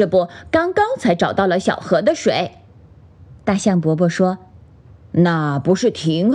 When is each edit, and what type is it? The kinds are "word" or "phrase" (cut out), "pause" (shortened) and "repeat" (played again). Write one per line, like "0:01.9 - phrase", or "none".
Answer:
none

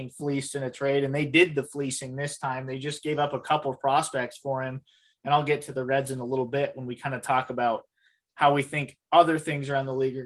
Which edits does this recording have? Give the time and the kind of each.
none

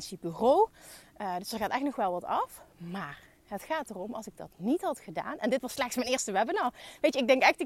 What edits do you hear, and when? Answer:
none

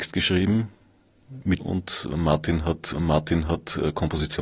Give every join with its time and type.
0:01.6 - word
0:02.9 - repeat

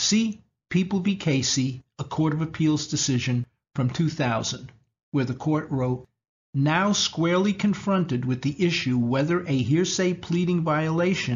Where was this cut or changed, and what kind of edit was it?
none

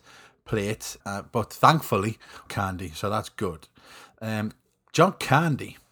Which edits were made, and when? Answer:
0:01.0 - word
0:02.5 - phrase

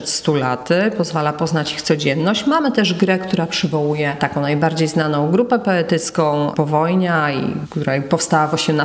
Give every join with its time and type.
none

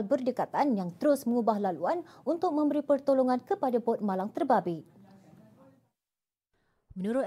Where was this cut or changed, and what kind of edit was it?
none

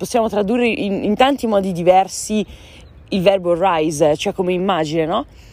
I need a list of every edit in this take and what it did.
none

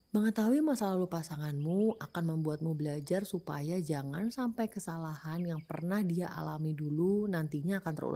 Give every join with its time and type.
none

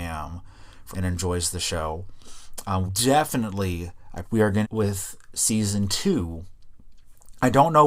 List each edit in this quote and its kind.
0:00.9 - phrase
0:02.9 - word
0:04.2 - word
0:04.6 - phrase

